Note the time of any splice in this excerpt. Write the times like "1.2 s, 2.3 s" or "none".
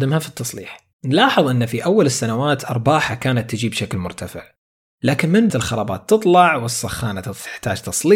0.9 s, 5.5 s